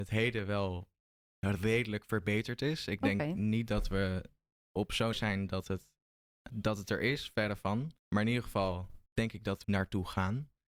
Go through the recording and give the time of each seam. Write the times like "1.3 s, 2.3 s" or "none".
1.0 s, 5.1 s, 6.5 s, 8.0 s, 9.1 s, 9.6 s